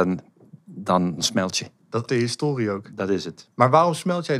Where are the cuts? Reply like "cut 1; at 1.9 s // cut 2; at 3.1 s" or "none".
cut 1; at 1.2 s // cut 2; at 2.1 s